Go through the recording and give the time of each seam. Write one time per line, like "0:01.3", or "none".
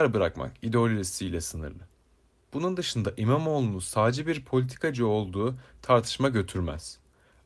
none

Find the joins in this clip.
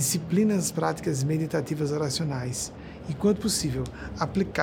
none

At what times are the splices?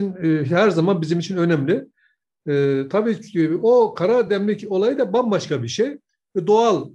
none

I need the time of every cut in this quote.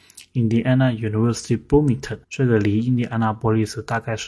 0:02.2

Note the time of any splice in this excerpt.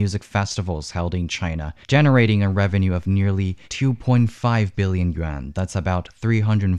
0:01.8
0:03.6

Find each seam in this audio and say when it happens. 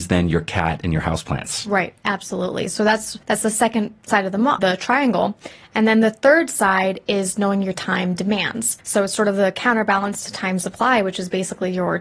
0:03.2
0:04.6
0:08.8

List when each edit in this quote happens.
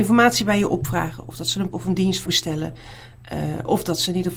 0:01.7
0:02.3

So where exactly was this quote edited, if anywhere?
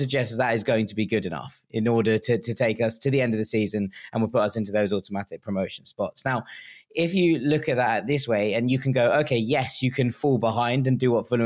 none

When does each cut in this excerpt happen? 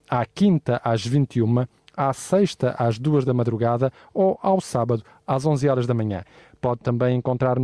none

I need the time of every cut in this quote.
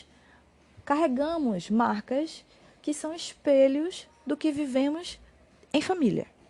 none

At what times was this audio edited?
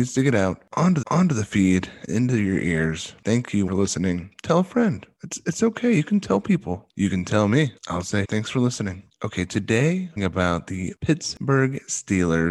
0:01.0
0:02.1
0:03.7
0:07.8
0:08.2
0:10.2

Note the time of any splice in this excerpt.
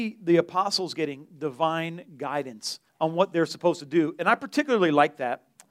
0:02.9

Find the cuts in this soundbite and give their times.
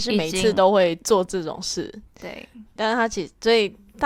0:02.8

